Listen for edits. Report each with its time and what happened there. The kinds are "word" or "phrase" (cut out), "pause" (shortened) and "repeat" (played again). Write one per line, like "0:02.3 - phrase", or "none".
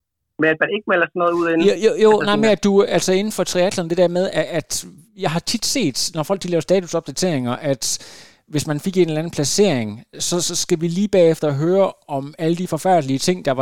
none